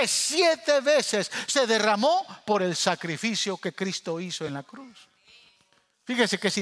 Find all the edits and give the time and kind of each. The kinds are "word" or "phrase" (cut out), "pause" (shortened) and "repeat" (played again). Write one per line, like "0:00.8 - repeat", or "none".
none